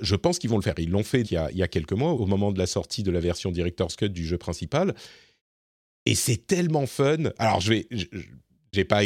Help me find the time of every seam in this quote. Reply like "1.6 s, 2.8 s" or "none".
1.2 s, 2.1 s

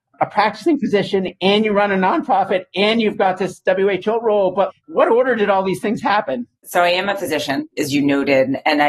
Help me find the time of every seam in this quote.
4.8 s, 6.6 s

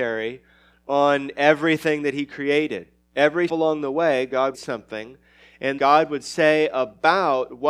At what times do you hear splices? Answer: 3.5 s, 4.5 s, 5.8 s

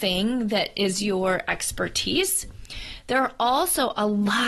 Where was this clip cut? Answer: none

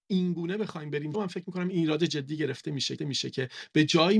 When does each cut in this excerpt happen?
1.1 s, 3.0 s

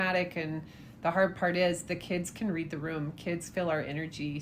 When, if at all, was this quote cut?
none

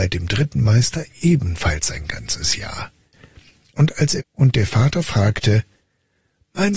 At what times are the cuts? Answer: 4.2 s

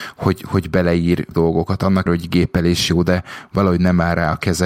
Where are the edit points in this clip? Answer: 1.3 s, 2.1 s

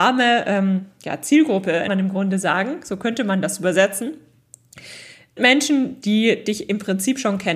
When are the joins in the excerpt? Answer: 1.9 s, 5.4 s

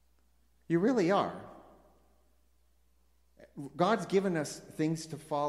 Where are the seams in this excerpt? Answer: none

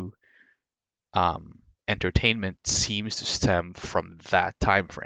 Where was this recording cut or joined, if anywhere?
none

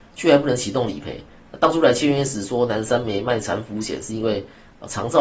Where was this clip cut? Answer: none

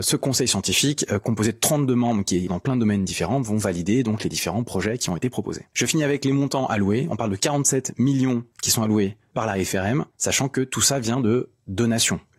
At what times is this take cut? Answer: 2.5 s, 8.5 s

